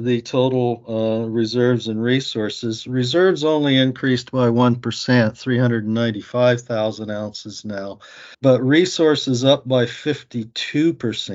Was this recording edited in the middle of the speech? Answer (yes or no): yes